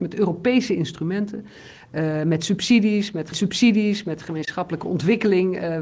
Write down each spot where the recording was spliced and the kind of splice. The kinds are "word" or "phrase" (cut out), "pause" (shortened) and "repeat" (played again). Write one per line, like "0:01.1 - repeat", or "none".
0:03.3 - repeat